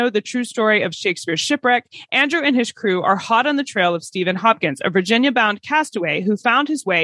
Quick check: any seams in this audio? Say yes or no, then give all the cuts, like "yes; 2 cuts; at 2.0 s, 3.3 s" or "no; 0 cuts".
no; 0 cuts